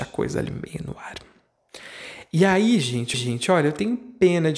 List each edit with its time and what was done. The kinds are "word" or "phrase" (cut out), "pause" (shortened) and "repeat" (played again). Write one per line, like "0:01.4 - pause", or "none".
0:03.1 - repeat